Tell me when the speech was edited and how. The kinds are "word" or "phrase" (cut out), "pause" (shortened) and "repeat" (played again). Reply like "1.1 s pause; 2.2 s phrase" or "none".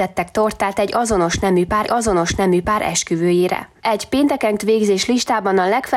1.8 s repeat; 4.6 s word